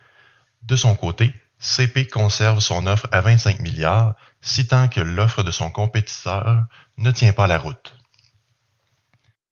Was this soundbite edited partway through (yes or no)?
no